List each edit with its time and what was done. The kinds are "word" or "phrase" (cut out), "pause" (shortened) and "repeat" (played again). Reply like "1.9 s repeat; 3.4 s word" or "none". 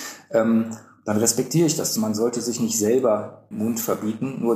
2.0 s word; 3.5 s word

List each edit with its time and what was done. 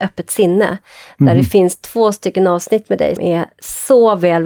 3.2 s word

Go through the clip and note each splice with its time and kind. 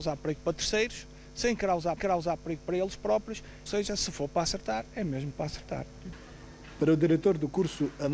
2.0 s repeat; 3.7 s phrase

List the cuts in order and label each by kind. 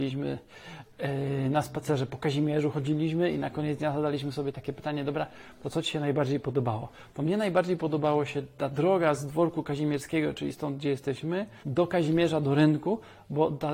11.6 s pause

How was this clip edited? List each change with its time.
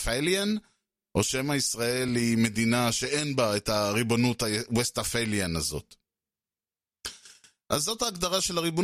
none

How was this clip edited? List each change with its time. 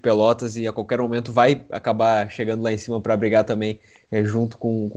none

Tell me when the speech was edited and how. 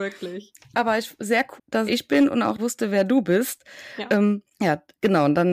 1.6 s word; 1.9 s phrase; 2.6 s word; 4.5 s pause

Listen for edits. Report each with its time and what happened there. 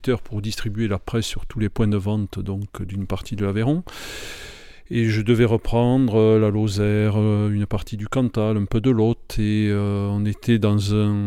none

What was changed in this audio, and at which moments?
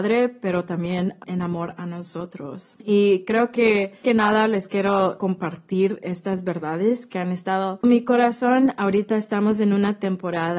1.2 s word; 4.0 s word; 5.2 s word; 7.8 s word

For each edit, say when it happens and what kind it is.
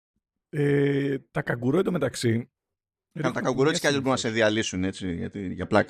none

